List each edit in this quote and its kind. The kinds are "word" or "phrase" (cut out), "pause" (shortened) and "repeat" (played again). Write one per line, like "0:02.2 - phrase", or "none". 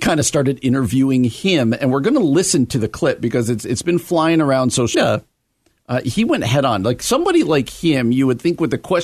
0:04.9 - phrase